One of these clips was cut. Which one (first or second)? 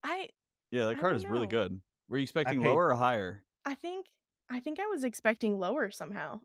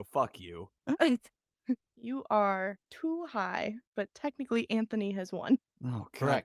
second